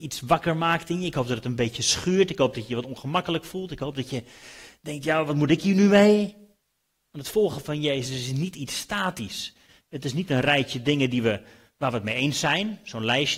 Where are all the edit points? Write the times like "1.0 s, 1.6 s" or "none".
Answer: none